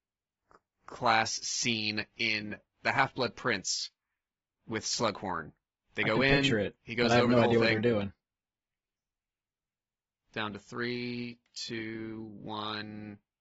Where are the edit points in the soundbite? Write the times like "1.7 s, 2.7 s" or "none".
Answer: none

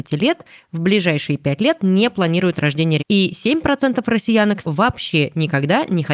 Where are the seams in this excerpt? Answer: 3.0 s, 4.6 s

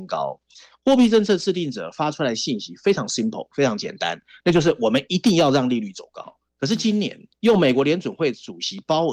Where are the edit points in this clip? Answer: 6.5 s, 7.3 s

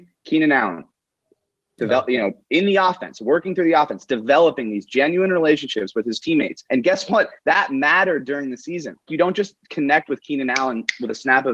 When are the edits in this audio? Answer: 6.7 s, 9.1 s

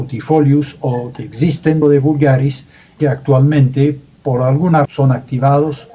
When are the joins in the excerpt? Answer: 1.8 s, 3.0 s, 4.8 s

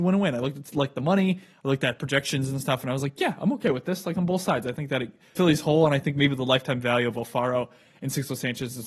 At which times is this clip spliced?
5.4 s

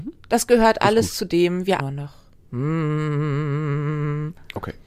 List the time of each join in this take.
1.8 s

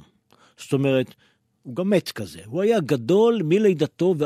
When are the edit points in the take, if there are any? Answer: none

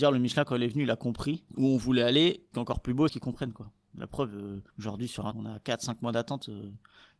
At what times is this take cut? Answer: 1.5 s, 2.5 s, 3.1 s, 4.7 s, 5.3 s

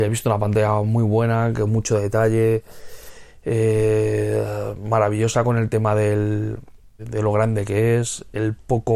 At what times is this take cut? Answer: 7.0 s

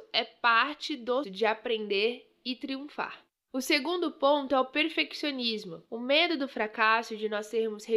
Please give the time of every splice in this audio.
1.2 s, 5.9 s

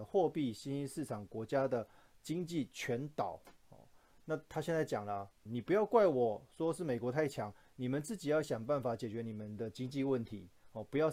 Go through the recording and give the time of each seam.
5.5 s

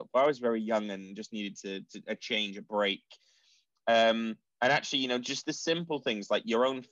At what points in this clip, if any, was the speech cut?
4.5 s

